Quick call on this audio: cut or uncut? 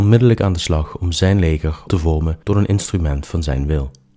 cut